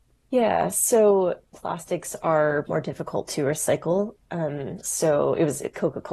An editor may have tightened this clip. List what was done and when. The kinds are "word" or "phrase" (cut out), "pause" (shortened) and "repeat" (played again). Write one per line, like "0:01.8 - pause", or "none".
0:01.5 - word
0:02.7 - word